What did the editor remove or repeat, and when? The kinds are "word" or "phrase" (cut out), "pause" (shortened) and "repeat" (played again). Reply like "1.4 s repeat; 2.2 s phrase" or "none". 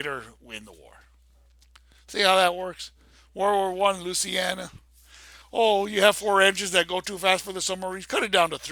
none